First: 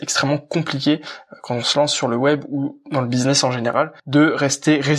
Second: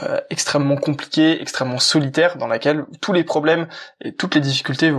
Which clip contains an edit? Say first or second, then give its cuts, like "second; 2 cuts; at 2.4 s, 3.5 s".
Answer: first; 1 cut; at 4.0 s